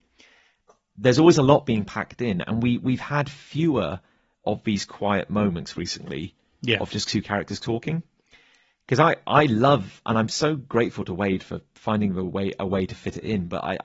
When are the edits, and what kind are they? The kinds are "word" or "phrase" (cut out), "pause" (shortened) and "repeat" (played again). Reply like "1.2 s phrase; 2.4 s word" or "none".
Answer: none